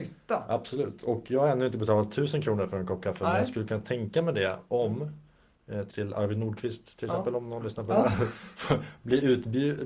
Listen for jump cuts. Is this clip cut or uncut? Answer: cut